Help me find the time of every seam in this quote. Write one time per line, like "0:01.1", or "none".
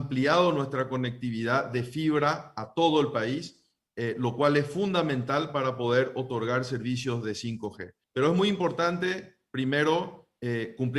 0:08.0